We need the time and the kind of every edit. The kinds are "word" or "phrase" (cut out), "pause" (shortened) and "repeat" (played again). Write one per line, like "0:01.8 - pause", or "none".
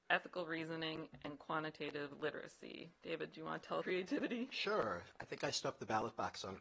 0:03.8 - phrase